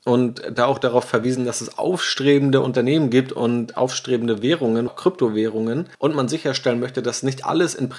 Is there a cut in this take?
yes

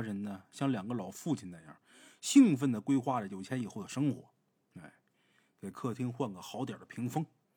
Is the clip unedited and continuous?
yes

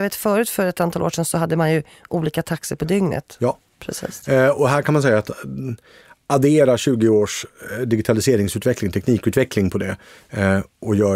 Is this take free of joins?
yes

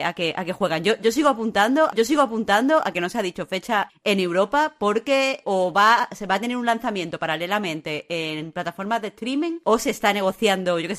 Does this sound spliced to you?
yes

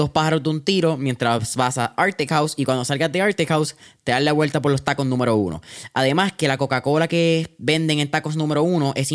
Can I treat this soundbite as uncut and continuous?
yes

